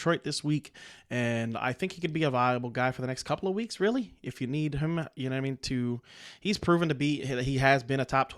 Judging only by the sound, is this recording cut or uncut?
uncut